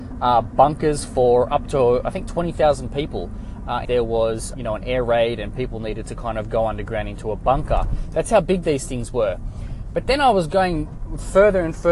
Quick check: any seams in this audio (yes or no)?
yes